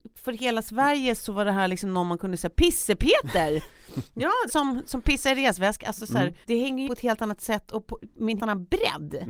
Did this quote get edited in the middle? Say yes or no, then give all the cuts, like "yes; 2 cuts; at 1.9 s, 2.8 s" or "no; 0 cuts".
yes; 5 cuts; at 1.2 s, 4.5 s, 6.4 s, 6.9 s, 8.4 s